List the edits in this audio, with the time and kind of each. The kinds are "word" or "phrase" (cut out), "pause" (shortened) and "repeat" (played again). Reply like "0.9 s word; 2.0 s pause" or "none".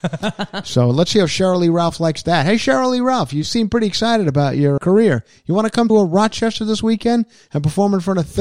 4.8 s word; 5.9 s word